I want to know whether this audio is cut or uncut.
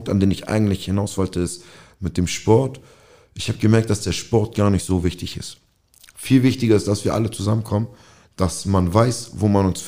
uncut